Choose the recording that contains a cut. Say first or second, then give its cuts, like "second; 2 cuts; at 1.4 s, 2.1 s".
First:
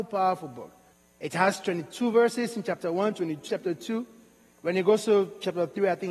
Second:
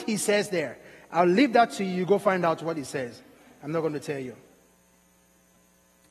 first; 2 cuts; at 0.9 s, 3.5 s